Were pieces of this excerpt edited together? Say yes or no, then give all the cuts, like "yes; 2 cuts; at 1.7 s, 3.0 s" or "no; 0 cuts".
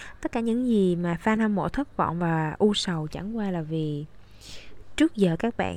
no; 0 cuts